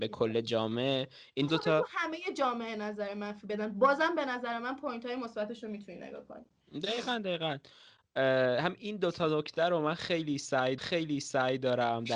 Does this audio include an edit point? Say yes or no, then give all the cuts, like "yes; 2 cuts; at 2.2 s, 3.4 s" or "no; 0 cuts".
yes; 2 cuts; at 1.5 s, 10.8 s